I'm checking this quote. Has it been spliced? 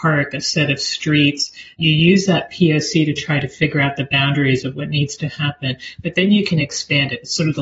no; 0 cuts

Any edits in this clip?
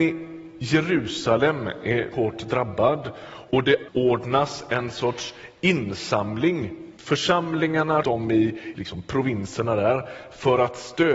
yes; 6 cuts; at 2.1 s, 3.5 s, 3.9 s, 7.0 s, 8.0 s, 8.7 s

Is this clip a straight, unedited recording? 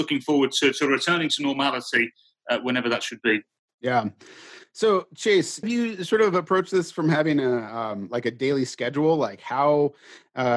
yes; 0 cuts

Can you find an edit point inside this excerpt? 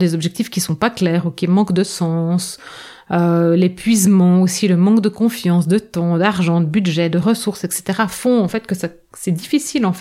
no; 0 cuts

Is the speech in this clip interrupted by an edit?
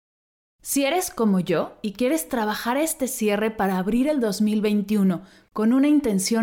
no; 0 cuts

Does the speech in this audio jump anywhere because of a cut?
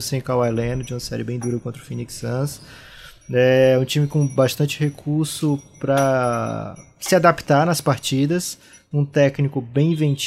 no; 0 cuts

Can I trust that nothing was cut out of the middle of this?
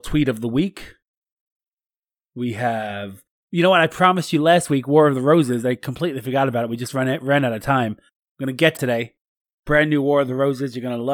no; 1 cut; at 8.8 s

